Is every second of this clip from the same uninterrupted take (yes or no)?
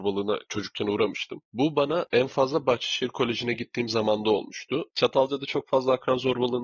yes